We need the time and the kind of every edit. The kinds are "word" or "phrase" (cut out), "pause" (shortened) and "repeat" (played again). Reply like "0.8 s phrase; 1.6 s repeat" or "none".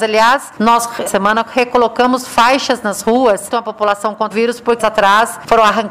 1.1 s word; 3.5 s phrase; 4.3 s phrase; 4.8 s phrase